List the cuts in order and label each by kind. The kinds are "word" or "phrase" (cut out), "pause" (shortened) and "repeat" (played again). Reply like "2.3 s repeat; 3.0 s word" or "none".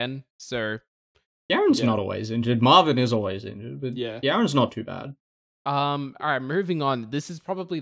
none